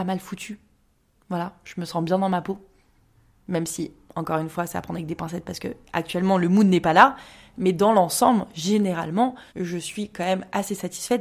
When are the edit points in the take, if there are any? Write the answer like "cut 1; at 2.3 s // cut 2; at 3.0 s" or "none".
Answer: cut 1; at 9.5 s